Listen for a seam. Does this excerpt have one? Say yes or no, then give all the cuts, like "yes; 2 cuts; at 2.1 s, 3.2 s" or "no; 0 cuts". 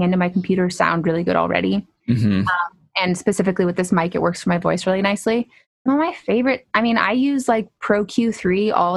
no; 0 cuts